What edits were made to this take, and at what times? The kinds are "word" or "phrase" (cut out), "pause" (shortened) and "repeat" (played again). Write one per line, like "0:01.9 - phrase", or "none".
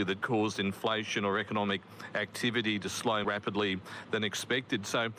0:03.2 - word